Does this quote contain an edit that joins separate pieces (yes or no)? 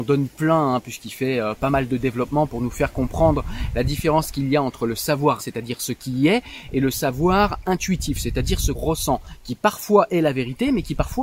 yes